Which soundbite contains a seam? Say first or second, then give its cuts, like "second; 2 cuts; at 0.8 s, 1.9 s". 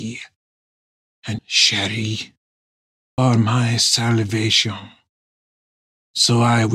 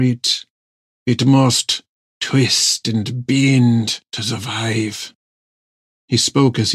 first; 2 cuts; at 1.4 s, 3.2 s